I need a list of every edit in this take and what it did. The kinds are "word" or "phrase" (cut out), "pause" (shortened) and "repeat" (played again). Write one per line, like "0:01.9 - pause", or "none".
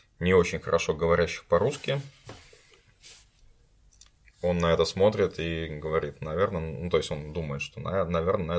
none